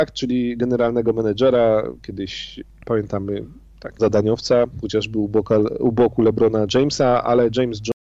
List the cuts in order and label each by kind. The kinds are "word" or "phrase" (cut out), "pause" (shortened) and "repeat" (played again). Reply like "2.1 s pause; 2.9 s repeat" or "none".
4.0 s word